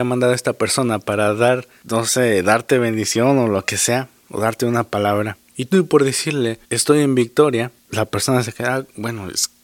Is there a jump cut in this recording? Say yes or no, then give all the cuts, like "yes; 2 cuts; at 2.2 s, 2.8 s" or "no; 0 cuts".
yes; 2 cuts; at 6.6 s, 7.8 s